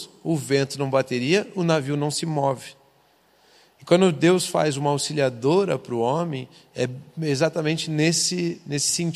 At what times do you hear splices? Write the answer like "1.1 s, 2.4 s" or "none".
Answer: none